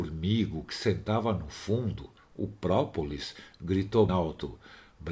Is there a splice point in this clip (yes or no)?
yes